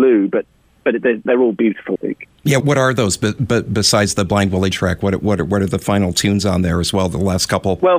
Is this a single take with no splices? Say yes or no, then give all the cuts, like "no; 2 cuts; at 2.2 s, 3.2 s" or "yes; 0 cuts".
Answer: no; 4 cuts; at 1.3 s, 2.0 s, 2.6 s, 4.7 s